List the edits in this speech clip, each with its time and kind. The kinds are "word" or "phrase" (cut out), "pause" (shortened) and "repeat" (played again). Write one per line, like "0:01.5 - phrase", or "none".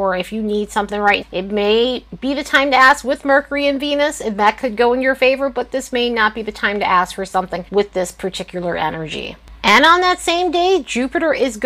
0:01.2 - word
0:07.7 - pause